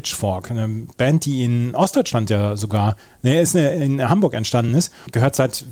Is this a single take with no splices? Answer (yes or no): yes